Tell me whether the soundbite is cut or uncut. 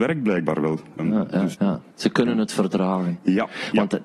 cut